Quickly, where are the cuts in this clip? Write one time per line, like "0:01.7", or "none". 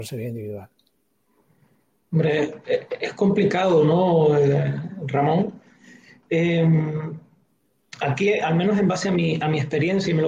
none